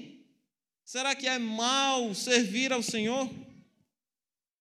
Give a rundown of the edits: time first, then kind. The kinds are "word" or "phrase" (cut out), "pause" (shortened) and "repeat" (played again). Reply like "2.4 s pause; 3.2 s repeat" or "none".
1.2 s word